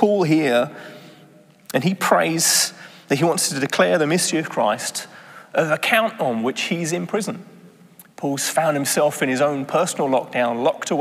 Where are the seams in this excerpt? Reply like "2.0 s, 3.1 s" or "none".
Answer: none